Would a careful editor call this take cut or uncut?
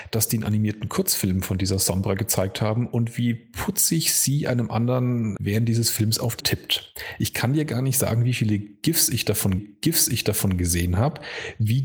cut